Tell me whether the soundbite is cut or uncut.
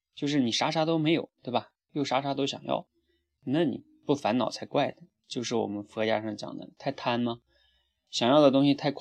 uncut